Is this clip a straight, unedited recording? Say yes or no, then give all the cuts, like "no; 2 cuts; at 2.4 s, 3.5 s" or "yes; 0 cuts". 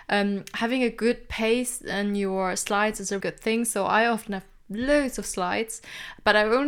no; 1 cut; at 3.2 s